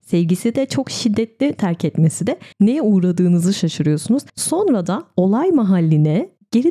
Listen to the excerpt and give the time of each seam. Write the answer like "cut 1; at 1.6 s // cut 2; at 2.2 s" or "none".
cut 1; at 2.5 s // cut 2; at 4.3 s